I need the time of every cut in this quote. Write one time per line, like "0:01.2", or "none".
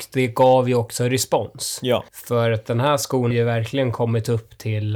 0:02.1
0:03.3